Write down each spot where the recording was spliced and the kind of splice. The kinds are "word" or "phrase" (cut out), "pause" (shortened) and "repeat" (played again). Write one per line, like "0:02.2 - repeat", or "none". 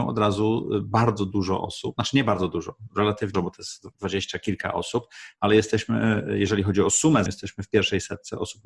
0:03.3 - word
0:03.9 - pause
0:07.3 - word